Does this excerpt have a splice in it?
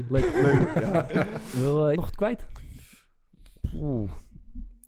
yes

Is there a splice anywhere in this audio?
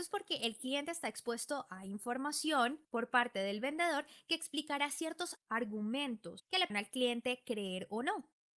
yes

